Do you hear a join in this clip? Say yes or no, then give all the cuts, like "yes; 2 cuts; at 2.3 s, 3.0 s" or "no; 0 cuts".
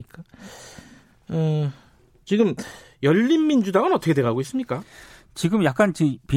no; 0 cuts